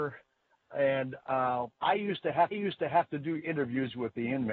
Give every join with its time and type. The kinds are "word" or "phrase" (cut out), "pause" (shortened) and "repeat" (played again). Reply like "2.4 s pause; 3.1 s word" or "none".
1.7 s pause; 2.5 s repeat